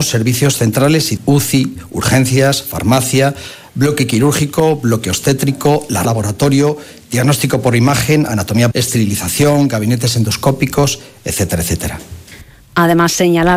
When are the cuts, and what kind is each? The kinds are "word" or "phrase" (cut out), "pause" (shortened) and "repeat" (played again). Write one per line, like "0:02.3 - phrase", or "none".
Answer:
0:01.2 - word
0:06.0 - word
0:08.7 - word